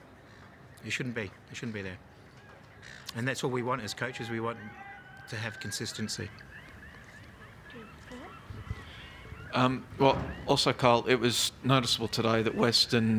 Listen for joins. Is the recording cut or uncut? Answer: cut